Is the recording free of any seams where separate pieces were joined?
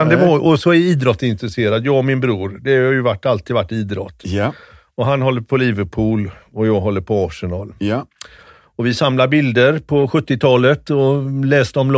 yes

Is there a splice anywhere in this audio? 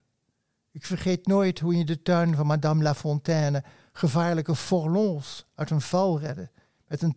no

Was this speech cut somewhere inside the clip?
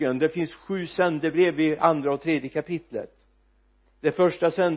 no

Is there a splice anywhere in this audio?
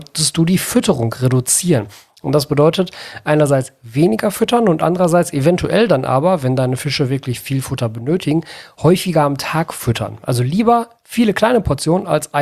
no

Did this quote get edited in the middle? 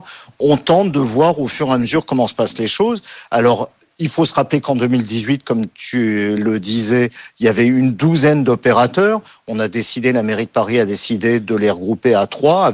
no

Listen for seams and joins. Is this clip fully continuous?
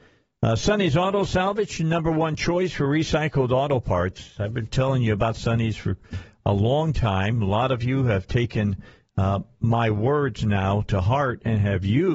yes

